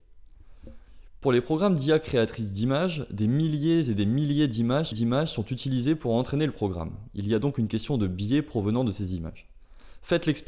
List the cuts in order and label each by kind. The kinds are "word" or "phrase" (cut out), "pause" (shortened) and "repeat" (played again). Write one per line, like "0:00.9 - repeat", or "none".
0:04.9 - repeat

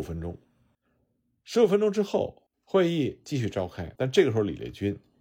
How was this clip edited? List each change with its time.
0:02.5 - pause
0:04.0 - pause

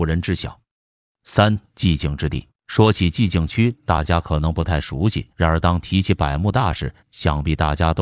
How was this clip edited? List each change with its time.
0:01.7 - pause
0:02.5 - pause
0:05.3 - pause
0:07.0 - pause

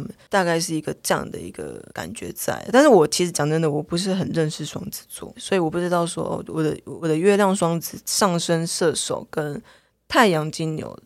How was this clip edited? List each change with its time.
0:01.9 - pause
0:05.3 - word

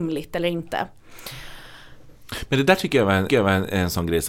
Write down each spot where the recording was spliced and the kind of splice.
0:03.3 - repeat

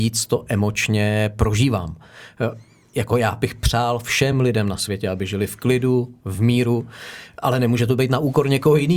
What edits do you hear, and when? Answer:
none

